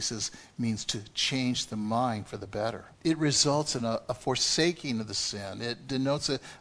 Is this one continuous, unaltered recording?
no; 1 cut; at 2.9 s

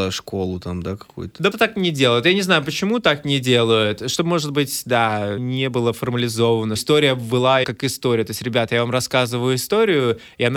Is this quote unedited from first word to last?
no; 4 cuts; at 1.5 s, 5.4 s, 6.8 s, 7.6 s

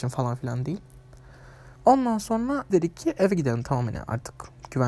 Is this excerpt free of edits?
no; 2 cuts; at 1.8 s, 2.7 s

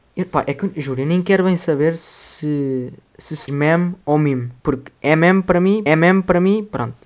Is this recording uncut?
no; 4 cuts; at 3.1 s, 3.5 s, 4.6 s, 5.9 s

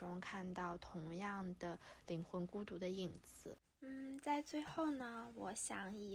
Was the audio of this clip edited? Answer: no; 0 cuts

